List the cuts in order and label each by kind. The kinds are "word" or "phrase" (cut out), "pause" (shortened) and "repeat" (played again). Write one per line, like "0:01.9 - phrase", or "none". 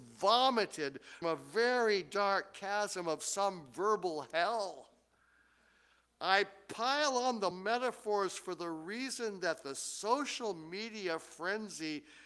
0:01.2 - word
0:07.5 - word

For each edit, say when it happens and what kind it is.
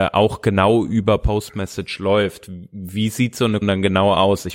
0:03.6 - word

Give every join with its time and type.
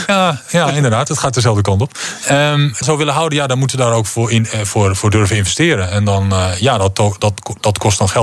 0:02.8 - phrase

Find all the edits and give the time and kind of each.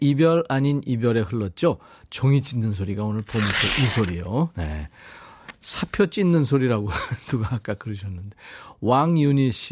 none

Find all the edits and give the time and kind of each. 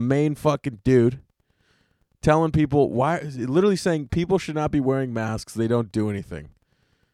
none

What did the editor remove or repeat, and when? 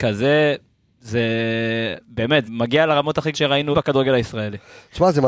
0:02.5 - word
0:03.3 - word
0:03.7 - word

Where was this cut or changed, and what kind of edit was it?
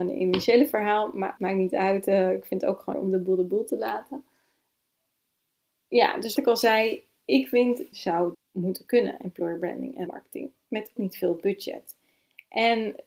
0:01.4 - word
0:02.9 - word
0:06.4 - word
0:07.9 - word
0:08.3 - word
0:10.1 - word
0:11.0 - word

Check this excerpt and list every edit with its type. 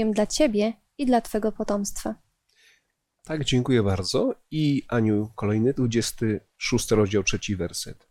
0:05.8 - word

